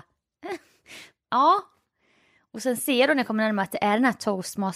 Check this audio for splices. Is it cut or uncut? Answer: uncut